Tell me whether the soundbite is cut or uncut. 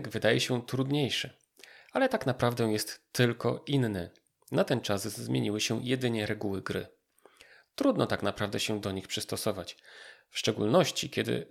uncut